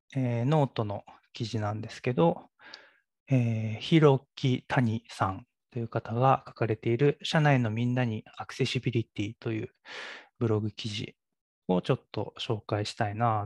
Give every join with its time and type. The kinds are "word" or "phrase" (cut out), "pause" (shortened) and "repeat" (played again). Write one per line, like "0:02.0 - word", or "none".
0:05.6 - pause
0:11.4 - pause

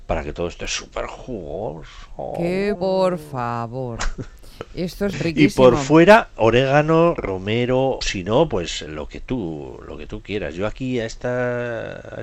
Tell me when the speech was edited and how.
0:02.7 - word
0:05.1 - word
0:08.0 - word
0:08.9 - word

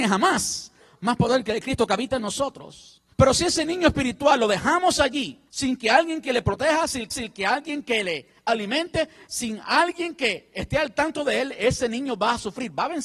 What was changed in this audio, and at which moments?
0:03.1 - pause
0:05.5 - pause
0:07.1 - repeat

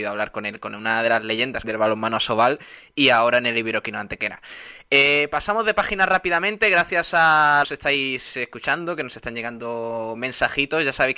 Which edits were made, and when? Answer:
0:01.6 - phrase
0:07.6 - phrase

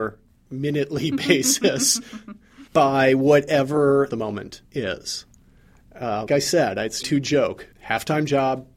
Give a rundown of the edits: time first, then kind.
0:02.7 - pause
0:04.1 - phrase
0:04.7 - pause
0:06.3 - word
0:07.0 - phrase
0:07.7 - pause

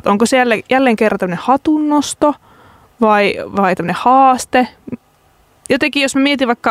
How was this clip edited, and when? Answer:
none

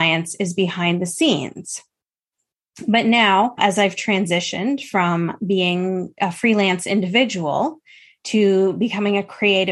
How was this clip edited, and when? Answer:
none

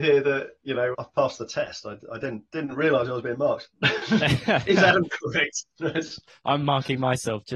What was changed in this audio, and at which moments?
0:00.9 - word

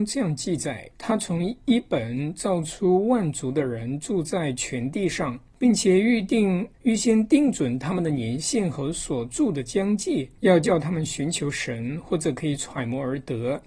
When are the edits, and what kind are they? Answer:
0:06.7 - pause

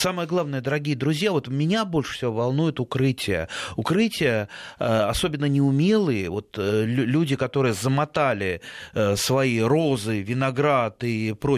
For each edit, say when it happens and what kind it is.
none

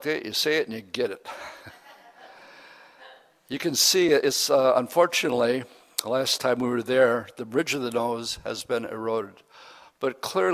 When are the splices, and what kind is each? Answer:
none

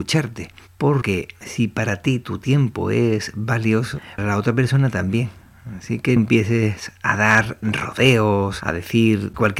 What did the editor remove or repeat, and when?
0:01.0 - word
0:04.2 - word
0:06.2 - word

